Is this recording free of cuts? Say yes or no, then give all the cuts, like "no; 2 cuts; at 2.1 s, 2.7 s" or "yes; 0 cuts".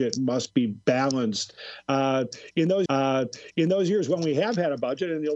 no; 1 cut; at 2.9 s